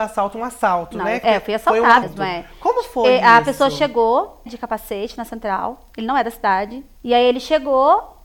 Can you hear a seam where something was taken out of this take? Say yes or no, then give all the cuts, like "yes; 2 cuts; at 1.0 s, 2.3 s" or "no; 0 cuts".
yes; 4 cuts; at 1.2 s, 2.0 s, 4.5 s, 7.0 s